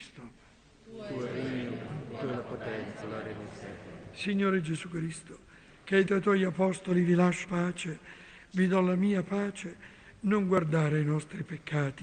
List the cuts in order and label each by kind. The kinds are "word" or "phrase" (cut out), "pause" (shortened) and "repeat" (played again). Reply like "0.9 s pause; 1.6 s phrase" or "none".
3.0 s word; 6.1 s word; 7.4 s word